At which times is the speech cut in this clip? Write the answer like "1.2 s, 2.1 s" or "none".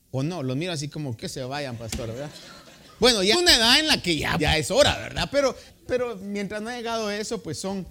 1.2 s, 3.3 s, 4.4 s, 5.7 s